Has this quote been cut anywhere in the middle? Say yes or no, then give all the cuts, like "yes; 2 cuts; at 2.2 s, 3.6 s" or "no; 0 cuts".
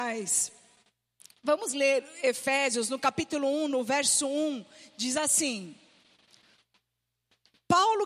no; 0 cuts